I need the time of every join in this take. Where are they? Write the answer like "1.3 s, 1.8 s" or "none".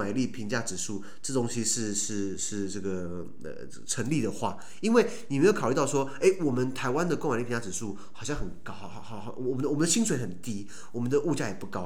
none